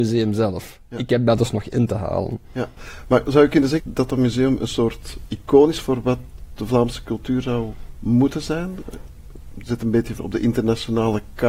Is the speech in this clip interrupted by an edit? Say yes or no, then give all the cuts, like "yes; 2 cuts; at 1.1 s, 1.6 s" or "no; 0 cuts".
yes; 3 cuts; at 3.8 s, 5.3 s, 10.2 s